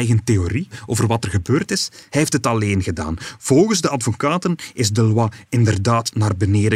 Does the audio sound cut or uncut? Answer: uncut